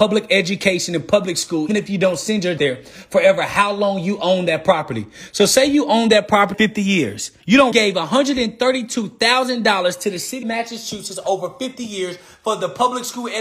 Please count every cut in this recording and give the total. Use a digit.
6